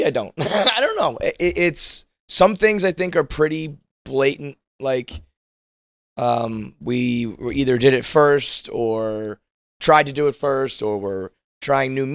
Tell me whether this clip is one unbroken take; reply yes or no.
yes